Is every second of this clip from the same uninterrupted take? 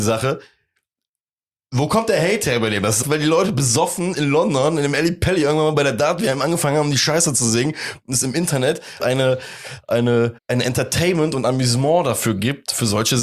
no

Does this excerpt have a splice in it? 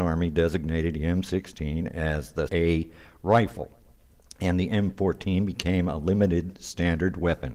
yes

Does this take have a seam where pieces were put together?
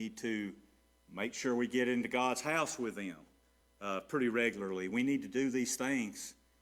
no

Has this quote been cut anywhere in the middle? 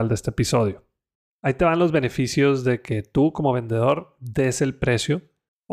no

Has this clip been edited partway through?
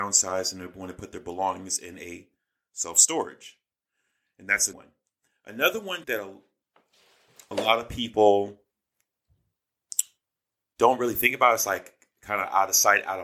yes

